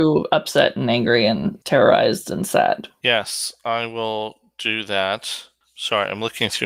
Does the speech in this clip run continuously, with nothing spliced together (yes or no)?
no